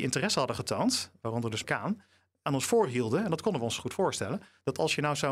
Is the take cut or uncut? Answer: cut